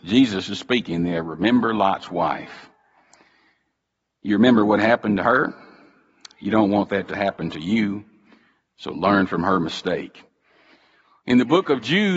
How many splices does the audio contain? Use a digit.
0